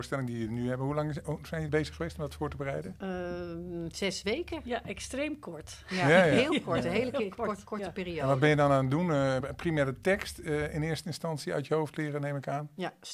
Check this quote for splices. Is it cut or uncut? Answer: cut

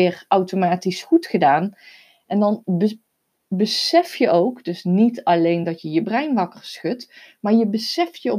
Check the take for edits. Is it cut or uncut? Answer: uncut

